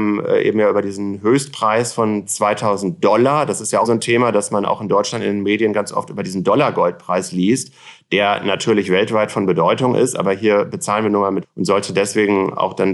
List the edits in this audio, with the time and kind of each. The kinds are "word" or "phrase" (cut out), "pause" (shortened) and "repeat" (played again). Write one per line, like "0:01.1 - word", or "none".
0:03.8 - word
0:11.4 - word

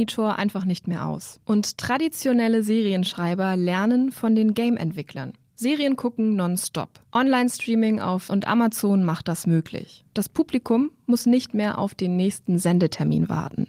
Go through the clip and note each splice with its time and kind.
0:08.3 - word

